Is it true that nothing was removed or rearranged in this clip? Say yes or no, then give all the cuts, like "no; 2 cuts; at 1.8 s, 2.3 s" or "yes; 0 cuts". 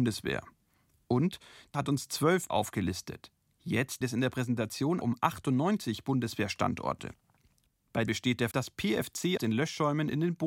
no; 7 cuts; at 1.7 s, 2.5 s, 4.0 s, 5.0 s, 8.1 s, 8.5 s, 9.4 s